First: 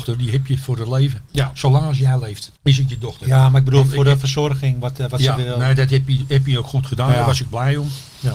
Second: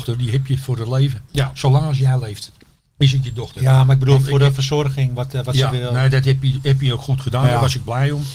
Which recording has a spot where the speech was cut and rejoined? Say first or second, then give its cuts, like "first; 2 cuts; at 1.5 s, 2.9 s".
first; 1 cut; at 2.5 s